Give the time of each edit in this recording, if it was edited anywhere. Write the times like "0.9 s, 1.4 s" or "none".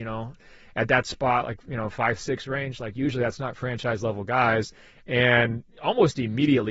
none